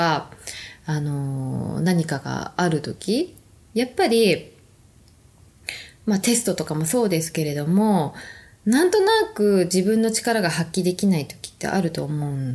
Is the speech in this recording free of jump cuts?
yes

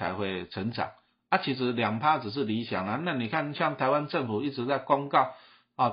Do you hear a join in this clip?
no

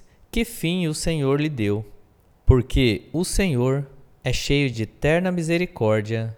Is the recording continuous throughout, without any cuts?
yes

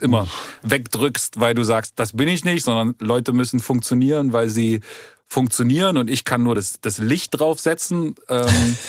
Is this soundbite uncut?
yes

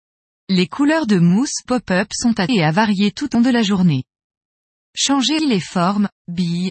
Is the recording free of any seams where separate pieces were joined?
no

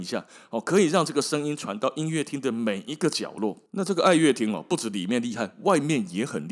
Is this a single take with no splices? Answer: no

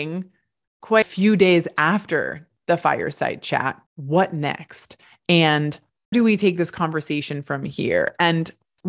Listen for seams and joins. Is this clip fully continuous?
no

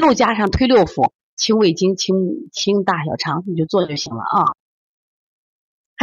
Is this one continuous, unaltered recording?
yes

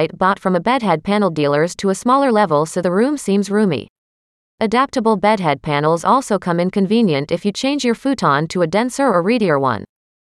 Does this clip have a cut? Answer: no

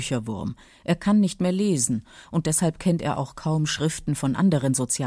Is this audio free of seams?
yes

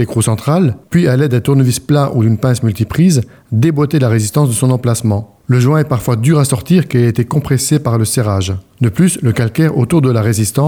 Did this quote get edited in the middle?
no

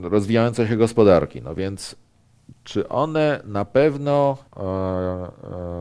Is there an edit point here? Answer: yes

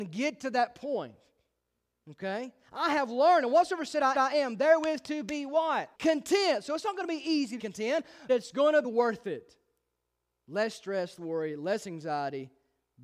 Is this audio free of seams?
no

